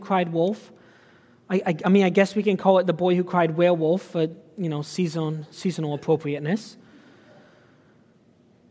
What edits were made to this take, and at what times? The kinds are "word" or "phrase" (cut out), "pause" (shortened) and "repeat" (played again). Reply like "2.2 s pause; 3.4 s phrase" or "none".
none